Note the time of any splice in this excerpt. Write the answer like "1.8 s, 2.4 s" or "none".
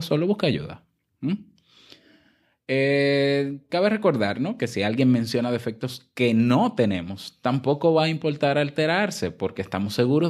none